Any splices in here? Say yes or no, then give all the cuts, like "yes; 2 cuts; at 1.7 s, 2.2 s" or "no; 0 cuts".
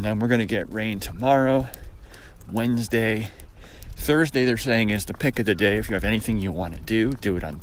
no; 0 cuts